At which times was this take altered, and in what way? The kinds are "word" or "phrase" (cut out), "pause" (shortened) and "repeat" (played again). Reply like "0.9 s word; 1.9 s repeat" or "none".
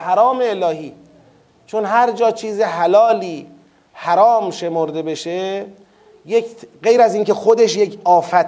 none